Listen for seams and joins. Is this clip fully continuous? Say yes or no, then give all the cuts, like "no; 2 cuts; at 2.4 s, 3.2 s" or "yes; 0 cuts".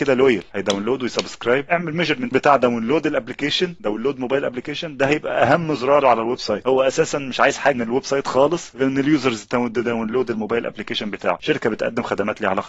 no; 3 cuts; at 2.3 s, 6.0 s, 7.7 s